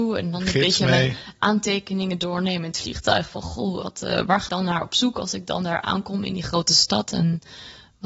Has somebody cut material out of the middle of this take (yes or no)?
yes